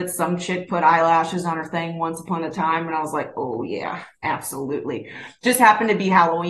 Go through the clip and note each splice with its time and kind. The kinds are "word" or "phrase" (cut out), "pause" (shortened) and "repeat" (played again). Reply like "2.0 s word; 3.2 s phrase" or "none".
4.1 s pause